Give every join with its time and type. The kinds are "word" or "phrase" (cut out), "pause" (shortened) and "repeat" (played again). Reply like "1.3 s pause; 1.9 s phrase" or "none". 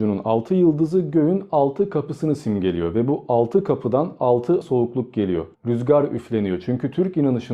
4.6 s word; 5.5 s pause